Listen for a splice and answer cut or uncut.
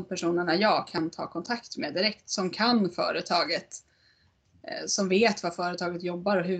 uncut